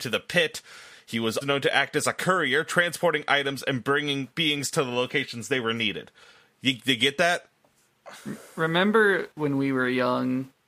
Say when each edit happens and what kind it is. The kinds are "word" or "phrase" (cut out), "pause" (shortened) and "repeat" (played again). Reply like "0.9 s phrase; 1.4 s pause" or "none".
1.4 s word; 9.3 s pause